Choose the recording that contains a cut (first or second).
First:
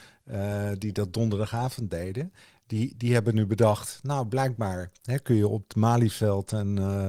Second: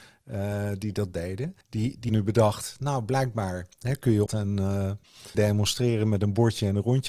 second